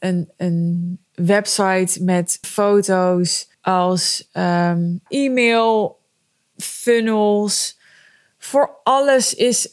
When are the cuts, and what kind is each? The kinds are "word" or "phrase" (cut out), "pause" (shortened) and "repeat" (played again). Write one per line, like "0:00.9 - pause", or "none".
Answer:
0:01.1 - pause
0:02.4 - word
0:03.5 - pause
0:05.1 - word